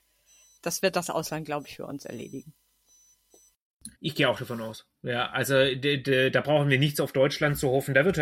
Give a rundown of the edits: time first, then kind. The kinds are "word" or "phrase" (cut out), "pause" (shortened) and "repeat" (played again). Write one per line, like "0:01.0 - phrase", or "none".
0:04.0 - pause

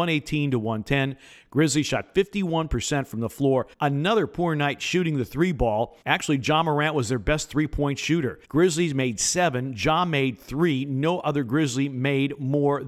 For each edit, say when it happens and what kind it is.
0:03.7 - pause
0:06.0 - pause
0:08.4 - pause

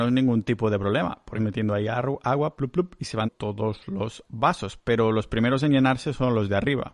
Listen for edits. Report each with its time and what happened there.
0:01.4 - word
0:02.6 - word
0:03.2 - word

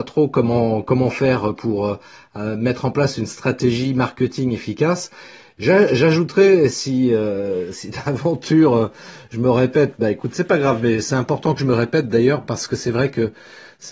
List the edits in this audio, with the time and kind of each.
none

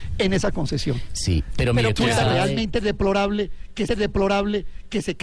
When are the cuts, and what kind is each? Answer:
0:02.0 - word
0:03.9 - repeat

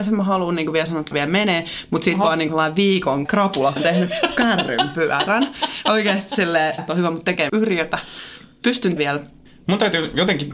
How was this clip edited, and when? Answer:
0:01.1 - word
0:02.5 - word
0:03.2 - word
0:03.8 - word
0:06.8 - word
0:07.5 - word
0:09.0 - word

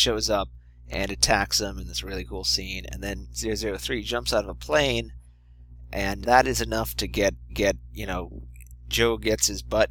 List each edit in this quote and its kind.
0:06.2 - word
0:07.5 - repeat

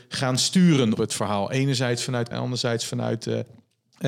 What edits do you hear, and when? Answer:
0:00.9 - word
0:02.3 - word

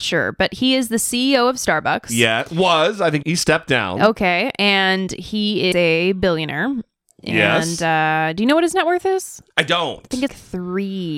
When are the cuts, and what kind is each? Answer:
0:03.2 - word
0:05.7 - word
0:10.3 - word

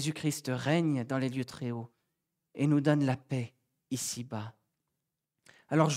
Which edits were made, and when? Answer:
none

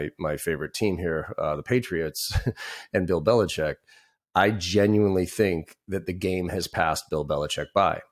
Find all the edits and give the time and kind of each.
none

